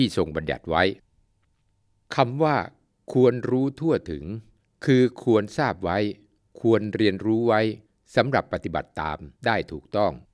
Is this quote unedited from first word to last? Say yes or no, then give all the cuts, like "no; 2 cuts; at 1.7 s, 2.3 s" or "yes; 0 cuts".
yes; 0 cuts